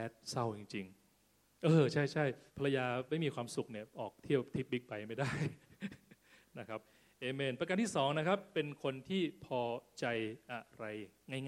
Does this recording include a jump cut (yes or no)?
yes